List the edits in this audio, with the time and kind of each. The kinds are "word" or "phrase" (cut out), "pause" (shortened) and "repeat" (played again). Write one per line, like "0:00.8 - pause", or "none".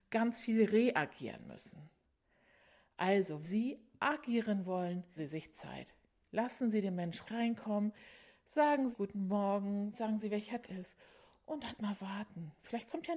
0:03.4 - word
0:05.2 - word
0:07.3 - word
0:08.9 - word
0:09.9 - word
0:10.6 - word
0:11.8 - word

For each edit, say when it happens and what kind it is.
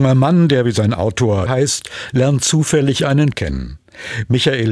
0:01.5 - word
0:03.3 - word

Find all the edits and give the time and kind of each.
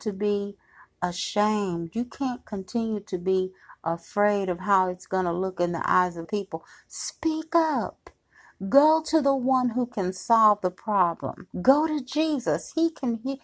0:06.2 - word
0:11.5 - pause

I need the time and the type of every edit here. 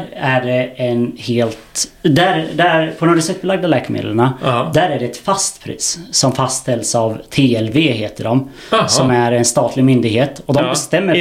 none

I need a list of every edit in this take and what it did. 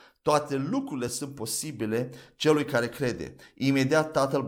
none

